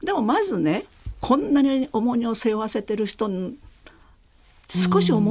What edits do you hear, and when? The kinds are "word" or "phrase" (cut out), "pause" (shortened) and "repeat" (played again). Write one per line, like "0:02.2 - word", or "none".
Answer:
none